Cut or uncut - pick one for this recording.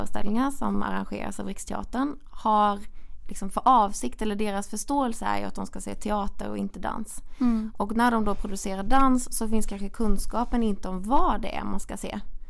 uncut